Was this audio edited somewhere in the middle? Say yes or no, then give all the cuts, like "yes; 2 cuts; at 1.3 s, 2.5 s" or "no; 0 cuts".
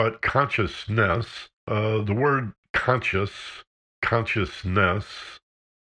yes; 2 cuts; at 1.6 s, 3.8 s